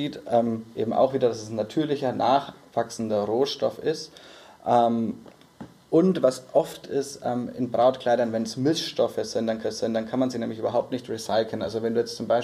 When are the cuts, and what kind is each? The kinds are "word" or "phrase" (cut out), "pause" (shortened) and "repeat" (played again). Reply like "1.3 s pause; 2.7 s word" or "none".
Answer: 6.8 s phrase; 9.6 s repeat